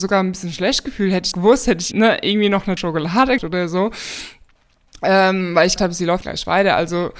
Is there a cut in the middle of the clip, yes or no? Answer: yes